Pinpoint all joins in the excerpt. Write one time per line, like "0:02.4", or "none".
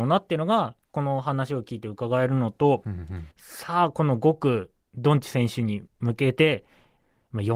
0:03.3
0:05.9